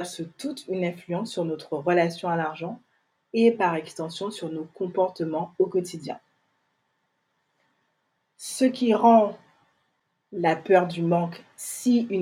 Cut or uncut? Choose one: uncut